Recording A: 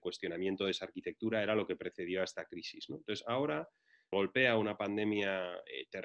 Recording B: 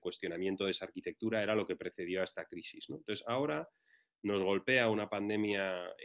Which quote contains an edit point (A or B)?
A